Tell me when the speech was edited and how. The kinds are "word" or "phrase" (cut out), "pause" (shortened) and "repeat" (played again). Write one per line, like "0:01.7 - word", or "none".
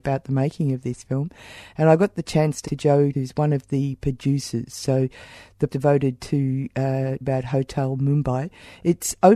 0:02.6 - word
0:03.1 - word
0:05.7 - word
0:07.2 - word